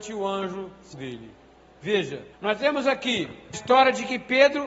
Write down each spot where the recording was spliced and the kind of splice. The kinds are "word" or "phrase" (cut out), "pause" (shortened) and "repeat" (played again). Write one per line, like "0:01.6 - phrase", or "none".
0:00.9 - word
0:02.3 - pause
0:03.5 - word